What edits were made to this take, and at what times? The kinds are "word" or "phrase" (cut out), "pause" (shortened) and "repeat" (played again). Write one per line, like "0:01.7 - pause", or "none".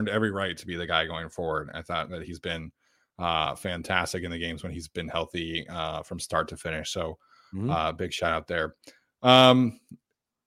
none